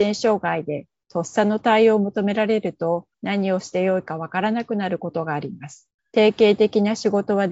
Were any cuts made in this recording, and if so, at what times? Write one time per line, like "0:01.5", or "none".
0:03.1
0:06.0